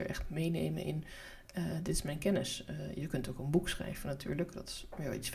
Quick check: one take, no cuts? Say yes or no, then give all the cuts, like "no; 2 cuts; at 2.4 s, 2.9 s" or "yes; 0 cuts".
yes; 0 cuts